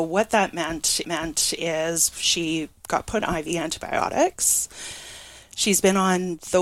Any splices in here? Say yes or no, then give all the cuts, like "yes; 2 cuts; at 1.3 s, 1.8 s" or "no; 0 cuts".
yes; 2 cuts; at 1.0 s, 3.2 s